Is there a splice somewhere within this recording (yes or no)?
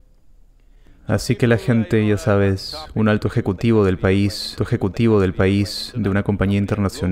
yes